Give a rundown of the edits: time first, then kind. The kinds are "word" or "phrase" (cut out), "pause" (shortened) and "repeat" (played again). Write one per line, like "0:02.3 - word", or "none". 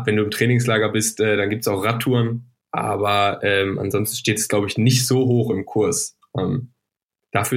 none

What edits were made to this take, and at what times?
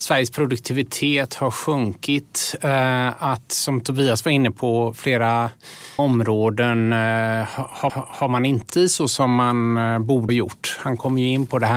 0:06.0 - word
0:07.9 - repeat
0:08.7 - word
0:10.3 - word

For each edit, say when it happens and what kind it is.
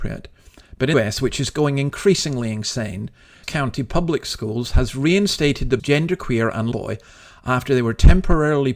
0:00.9 - word
0:03.4 - word
0:05.8 - word
0:06.7 - word

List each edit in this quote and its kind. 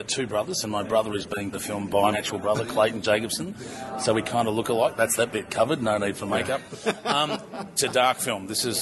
0:01.5 - phrase
0:02.1 - word
0:07.8 - phrase

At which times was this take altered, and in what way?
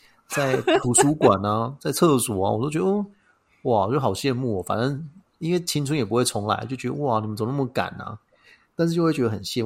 none

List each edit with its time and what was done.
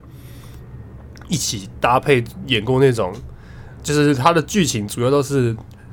0:03.8 - word

